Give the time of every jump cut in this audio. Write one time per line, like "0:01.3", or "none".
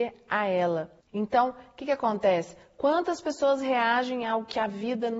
0:01.0